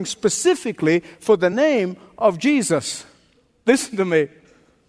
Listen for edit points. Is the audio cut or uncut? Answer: uncut